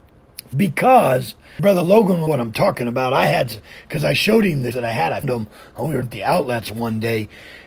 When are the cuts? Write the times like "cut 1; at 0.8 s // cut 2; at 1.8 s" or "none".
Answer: cut 1; at 1.6 s // cut 2; at 2.3 s // cut 3; at 4.7 s // cut 4; at 5.2 s // cut 5; at 6.0 s

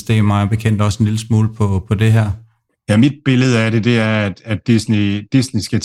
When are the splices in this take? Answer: cut 1; at 2.7 s

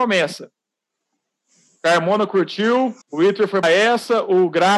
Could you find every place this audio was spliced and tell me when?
cut 1; at 3.0 s // cut 2; at 3.6 s

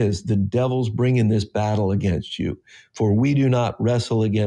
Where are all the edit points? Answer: none

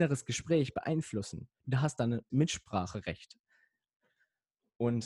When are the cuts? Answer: cut 1; at 2.3 s

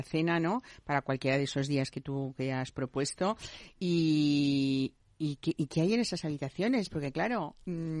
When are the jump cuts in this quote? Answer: none

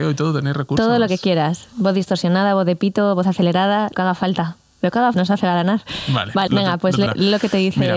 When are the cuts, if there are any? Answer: cut 1; at 3.9 s // cut 2; at 5.1 s // cut 3; at 6.5 s // cut 4; at 7.1 s

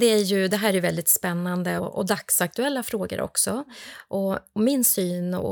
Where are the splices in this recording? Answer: cut 1; at 1.8 s

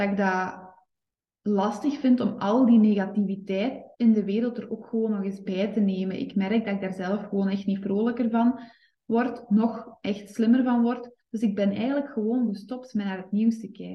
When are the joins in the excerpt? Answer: cut 1; at 3.9 s

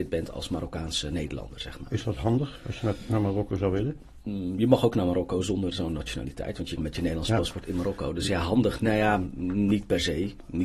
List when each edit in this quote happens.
cut 1; at 6.8 s

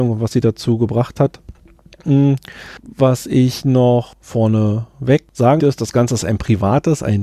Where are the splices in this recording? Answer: cut 1; at 5.6 s

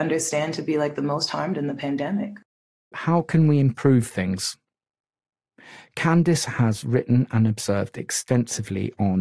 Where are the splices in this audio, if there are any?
cut 1; at 2.9 s

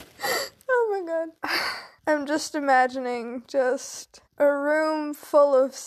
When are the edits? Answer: cut 1; at 1.4 s // cut 2; at 2.0 s // cut 3; at 4.3 s

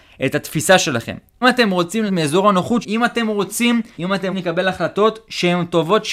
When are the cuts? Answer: cut 1; at 1.4 s // cut 2; at 2.1 s // cut 3; at 2.8 s // cut 4; at 4.0 s // cut 5; at 4.3 s

